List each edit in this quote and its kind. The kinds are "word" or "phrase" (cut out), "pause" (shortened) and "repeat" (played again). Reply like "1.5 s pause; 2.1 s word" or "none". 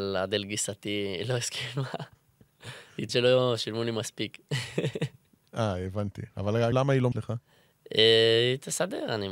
3.1 s word; 6.7 s word; 7.1 s word